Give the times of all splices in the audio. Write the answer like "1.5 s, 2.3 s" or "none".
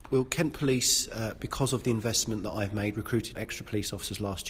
3.3 s